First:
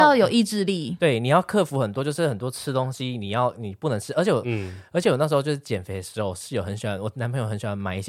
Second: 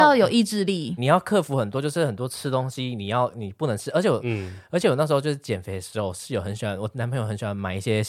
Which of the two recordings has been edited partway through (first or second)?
second